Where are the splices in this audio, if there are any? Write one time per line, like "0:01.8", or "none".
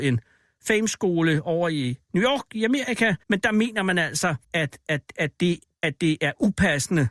0:02.0
0:03.2
0:04.4